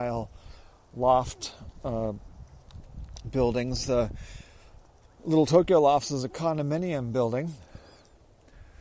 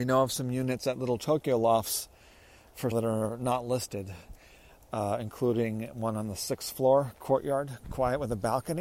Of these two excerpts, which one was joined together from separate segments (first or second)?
second